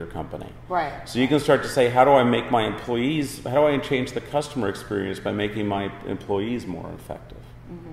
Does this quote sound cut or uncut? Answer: uncut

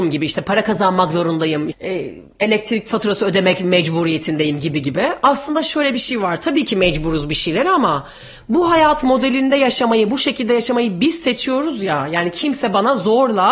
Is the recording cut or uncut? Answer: cut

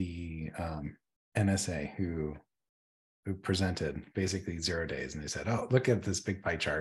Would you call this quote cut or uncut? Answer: uncut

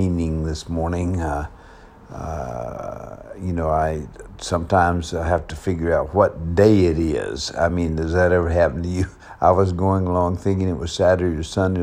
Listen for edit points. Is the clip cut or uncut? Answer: uncut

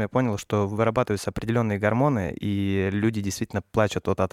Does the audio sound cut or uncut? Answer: uncut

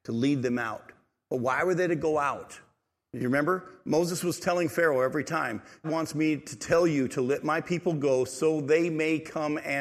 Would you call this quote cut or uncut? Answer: cut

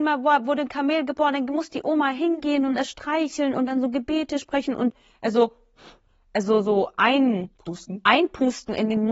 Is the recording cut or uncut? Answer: uncut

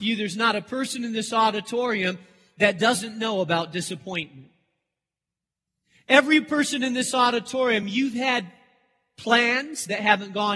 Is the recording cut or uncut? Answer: uncut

